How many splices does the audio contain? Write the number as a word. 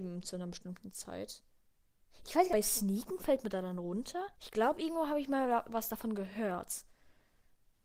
two